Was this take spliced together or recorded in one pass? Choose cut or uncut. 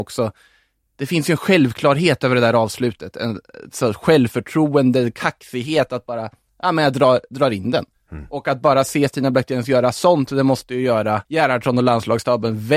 cut